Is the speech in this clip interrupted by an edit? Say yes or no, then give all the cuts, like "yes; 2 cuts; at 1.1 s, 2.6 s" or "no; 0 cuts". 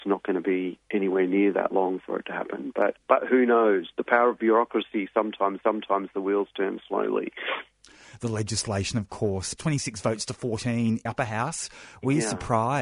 yes; 3 cuts; at 5.6 s, 9.6 s, 11.1 s